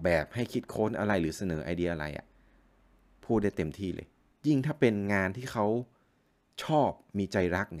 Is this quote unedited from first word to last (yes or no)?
yes